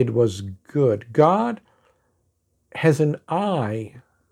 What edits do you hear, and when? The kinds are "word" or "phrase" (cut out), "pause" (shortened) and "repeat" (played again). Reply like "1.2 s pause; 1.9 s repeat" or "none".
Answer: none